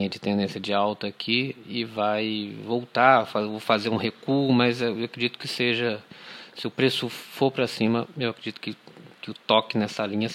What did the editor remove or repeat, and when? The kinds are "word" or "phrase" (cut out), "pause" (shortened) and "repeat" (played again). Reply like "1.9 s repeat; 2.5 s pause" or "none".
none